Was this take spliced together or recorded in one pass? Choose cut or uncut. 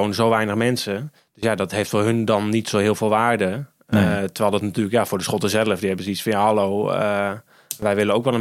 cut